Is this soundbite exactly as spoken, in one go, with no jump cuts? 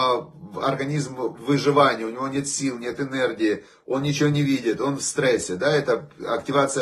yes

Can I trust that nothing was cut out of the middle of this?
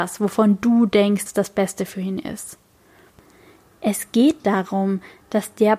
no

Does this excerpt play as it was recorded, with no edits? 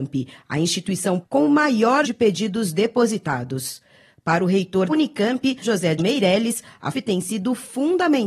no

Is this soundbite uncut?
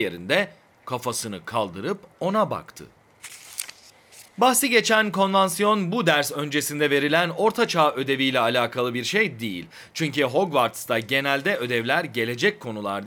no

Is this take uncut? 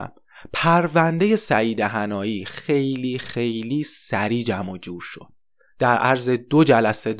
yes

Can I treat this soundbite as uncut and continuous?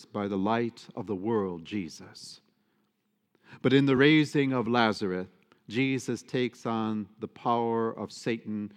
yes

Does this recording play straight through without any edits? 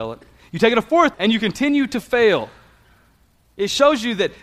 no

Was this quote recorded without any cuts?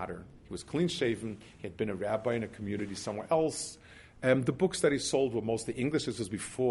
yes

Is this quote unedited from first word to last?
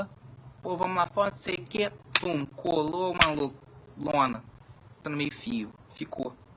no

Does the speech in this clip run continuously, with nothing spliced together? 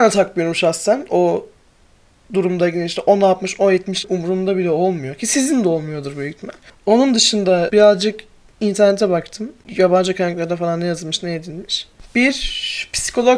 no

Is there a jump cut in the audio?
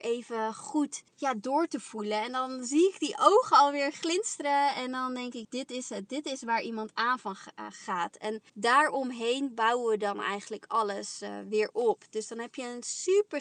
yes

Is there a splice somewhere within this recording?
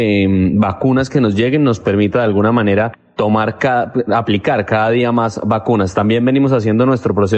no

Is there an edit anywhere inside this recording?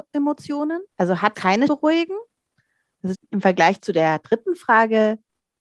yes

